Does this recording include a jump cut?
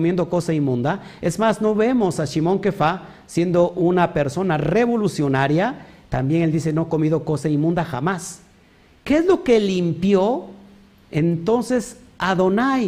no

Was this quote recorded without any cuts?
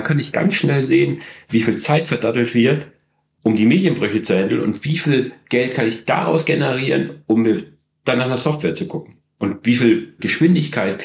yes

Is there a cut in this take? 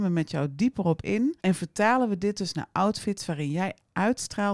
yes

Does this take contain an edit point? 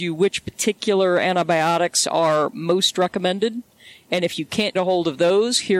yes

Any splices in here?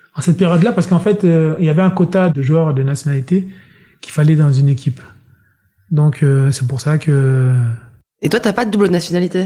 no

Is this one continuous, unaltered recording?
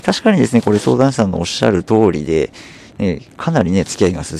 yes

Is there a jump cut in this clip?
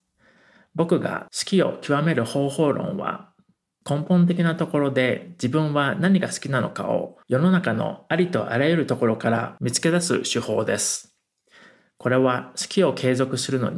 yes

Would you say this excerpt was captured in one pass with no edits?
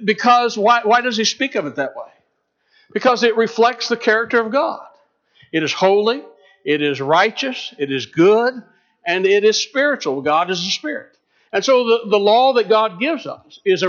yes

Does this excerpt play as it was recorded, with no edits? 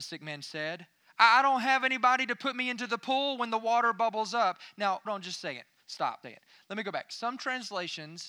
no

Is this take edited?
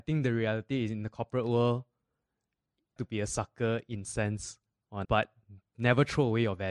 yes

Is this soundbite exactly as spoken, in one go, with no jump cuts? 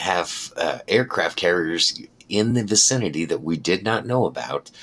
yes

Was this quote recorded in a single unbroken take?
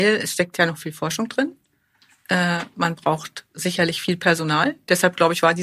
yes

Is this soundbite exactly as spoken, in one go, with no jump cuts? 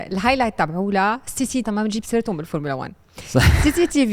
no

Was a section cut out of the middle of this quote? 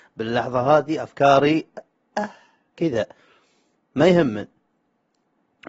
no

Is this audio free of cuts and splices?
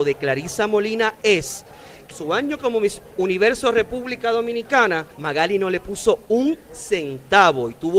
no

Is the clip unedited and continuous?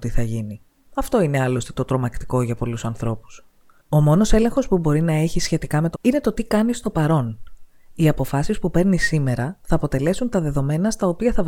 no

